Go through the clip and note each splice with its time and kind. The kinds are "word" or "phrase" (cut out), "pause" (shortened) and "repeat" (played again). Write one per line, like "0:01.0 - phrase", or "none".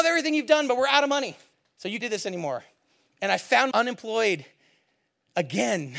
0:01.5 - pause
0:02.0 - word
0:03.7 - word